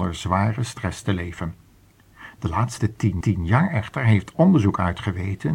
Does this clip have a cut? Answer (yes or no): yes